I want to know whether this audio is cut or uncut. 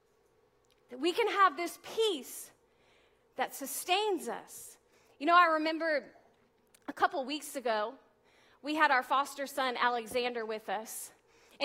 uncut